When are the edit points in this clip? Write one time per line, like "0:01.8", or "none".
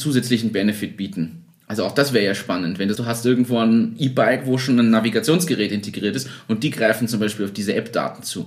0:02.9